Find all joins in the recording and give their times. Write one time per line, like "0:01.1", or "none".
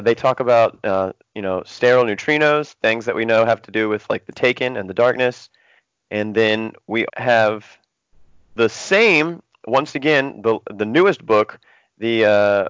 0:07.1